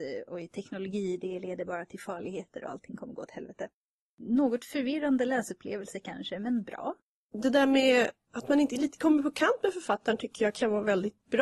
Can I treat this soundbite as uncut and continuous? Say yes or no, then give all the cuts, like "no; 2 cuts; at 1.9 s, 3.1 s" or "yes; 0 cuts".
yes; 0 cuts